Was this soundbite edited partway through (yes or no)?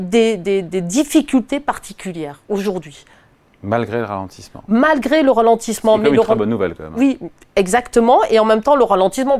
no